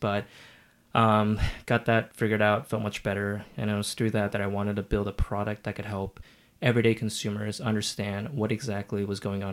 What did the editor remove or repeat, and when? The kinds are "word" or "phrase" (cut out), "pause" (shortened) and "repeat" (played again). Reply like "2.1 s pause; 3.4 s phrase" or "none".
none